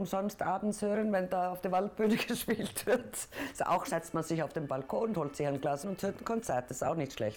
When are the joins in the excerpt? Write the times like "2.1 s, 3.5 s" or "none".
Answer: 3.9 s, 5.8 s